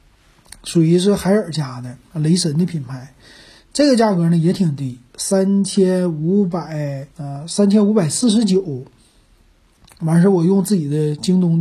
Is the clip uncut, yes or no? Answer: no